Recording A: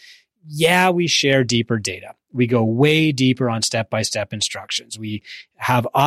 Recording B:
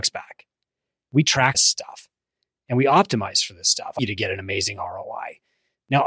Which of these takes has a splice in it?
B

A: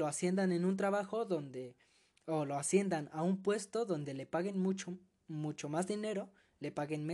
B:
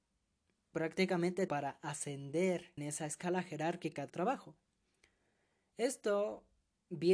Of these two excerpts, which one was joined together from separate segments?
B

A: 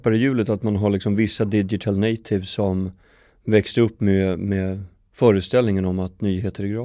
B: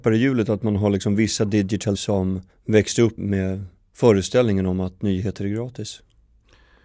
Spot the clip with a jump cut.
B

